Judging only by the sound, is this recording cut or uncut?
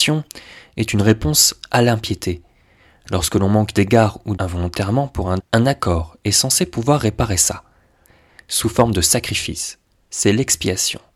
cut